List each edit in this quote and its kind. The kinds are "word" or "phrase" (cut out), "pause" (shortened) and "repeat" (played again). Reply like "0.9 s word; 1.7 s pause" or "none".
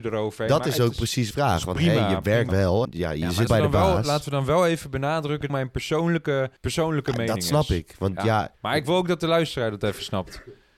1.3 s phrase; 2.5 s word; 2.8 s word; 3.5 s word; 5.5 s phrase; 6.6 s pause; 8.5 s pause